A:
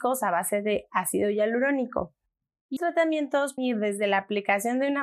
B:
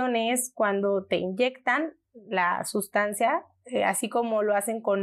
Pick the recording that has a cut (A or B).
A